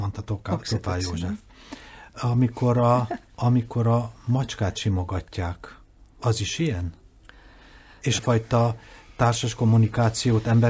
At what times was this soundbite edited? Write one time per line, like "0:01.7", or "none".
0:03.3
0:08.2